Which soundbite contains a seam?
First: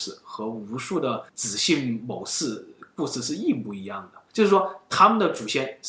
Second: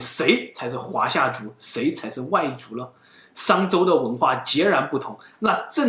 first; 2 cuts; at 1.3 s, 4.3 s

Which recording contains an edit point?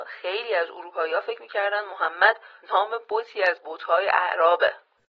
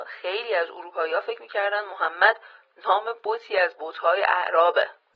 first; 1 cut; at 2.6 s

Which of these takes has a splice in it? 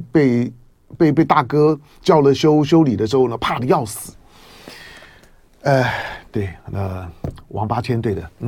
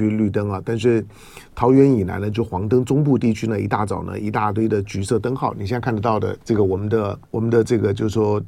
second; 2 cuts; at 6.4 s, 7.2 s

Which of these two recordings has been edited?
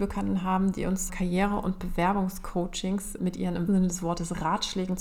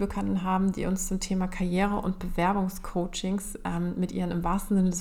first; 3 cuts; at 1.1 s, 3.2 s, 3.7 s

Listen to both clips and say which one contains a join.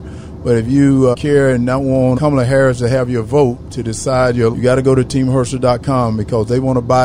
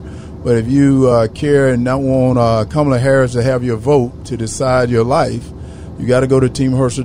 first; 3 cuts; at 1.1 s, 2.1 s, 4.5 s

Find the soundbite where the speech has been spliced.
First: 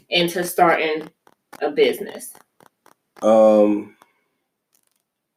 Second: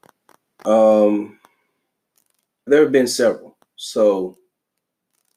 second; 1 cut; at 2.7 s

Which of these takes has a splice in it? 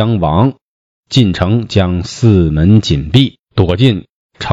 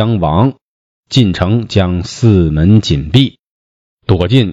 first; 1 cut; at 3.4 s

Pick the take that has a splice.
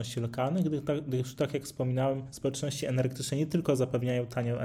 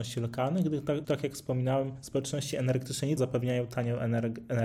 second; 2 cuts; at 1.0 s, 3.2 s

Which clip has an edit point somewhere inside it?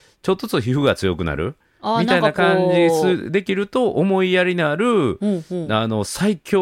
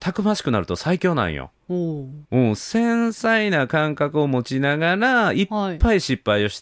second; 2 cuts; at 1.6 s, 2.2 s

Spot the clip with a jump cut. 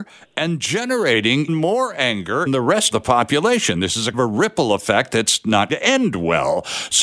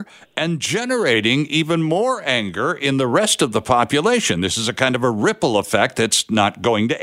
first; 5 cuts; at 1.5 s, 2.5 s, 2.9 s, 4.1 s, 5.7 s

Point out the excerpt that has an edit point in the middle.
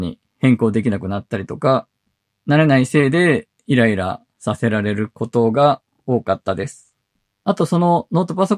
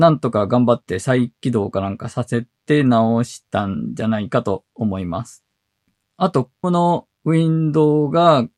second; 2 cuts; at 6.6 s, 7.1 s

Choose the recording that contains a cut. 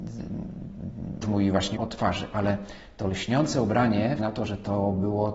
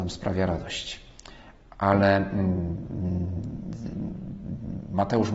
first; 3 cuts; at 1.2 s, 1.8 s, 4.2 s

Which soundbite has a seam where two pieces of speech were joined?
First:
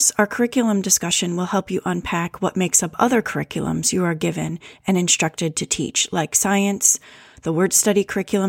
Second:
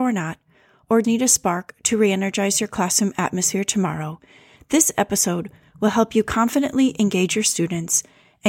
second; 1 cut; at 1.0 s

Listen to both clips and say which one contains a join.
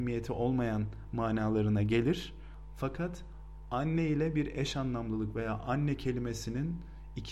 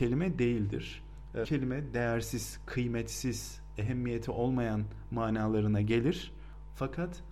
second; 1 cut; at 1.4 s

